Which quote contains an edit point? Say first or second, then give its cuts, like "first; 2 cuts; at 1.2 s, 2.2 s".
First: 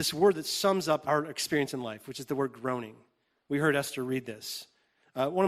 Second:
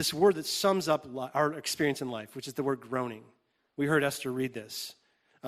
first; 1 cut; at 1.0 s